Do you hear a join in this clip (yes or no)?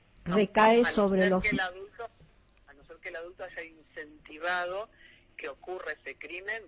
no